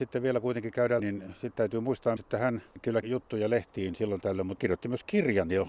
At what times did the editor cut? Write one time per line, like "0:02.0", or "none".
0:01.0
0:02.2
0:03.0
0:04.6